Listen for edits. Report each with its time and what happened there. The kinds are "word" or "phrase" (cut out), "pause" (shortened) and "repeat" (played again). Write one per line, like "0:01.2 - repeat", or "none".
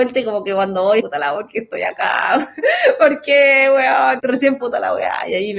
0:01.0 - word
0:01.4 - word
0:04.2 - word
0:04.6 - word